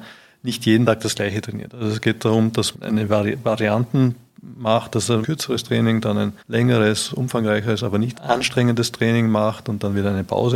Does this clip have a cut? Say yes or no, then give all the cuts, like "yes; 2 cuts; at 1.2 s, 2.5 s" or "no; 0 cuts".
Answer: yes; 4 cuts; at 2.7 s, 5.2 s, 6.4 s, 8.1 s